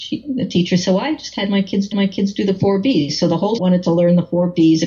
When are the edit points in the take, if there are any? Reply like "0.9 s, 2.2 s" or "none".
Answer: 1.9 s, 3.6 s